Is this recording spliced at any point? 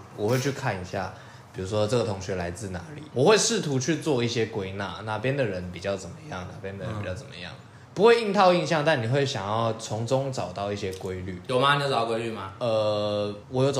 yes; 1 cut; at 3.1 s

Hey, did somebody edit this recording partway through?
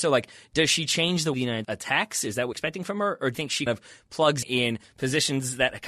yes; 6 cuts; at 1.3 s, 1.6 s, 2.5 s, 3.3 s, 3.7 s, 4.4 s

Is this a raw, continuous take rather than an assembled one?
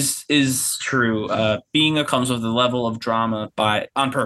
no; 1 cut; at 2.0 s

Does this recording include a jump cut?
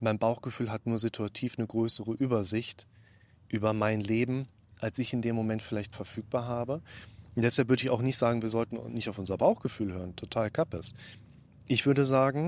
yes; 1 cut; at 5.9 s

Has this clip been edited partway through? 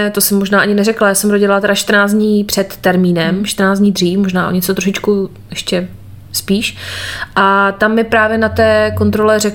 no; 0 cuts

